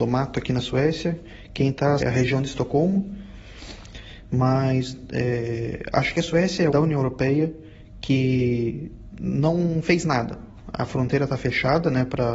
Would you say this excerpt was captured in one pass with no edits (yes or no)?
no